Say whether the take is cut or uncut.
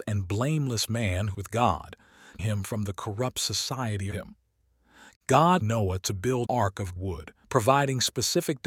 cut